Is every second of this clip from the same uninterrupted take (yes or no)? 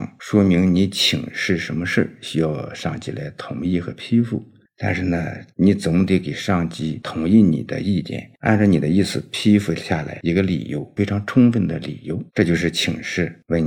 no